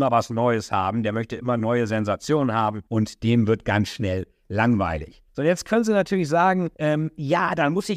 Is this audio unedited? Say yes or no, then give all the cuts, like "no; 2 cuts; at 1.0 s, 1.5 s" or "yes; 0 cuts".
no; 3 cuts; at 2.9 s, 5.3 s, 6.7 s